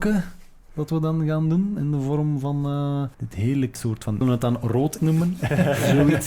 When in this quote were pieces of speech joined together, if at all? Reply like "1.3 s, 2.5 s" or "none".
3.1 s, 3.7 s, 4.2 s, 5.0 s